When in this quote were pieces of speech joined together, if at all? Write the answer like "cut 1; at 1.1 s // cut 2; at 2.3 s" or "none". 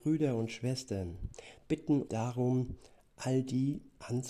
cut 1; at 1.6 s // cut 2; at 2.1 s